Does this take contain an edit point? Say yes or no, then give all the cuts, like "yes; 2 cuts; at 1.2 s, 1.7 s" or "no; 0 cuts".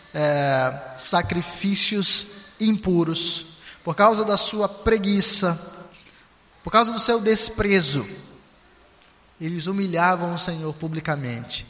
no; 0 cuts